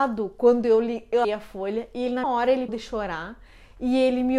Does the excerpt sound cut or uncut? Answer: cut